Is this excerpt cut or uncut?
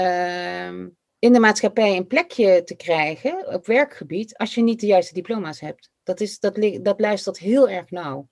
cut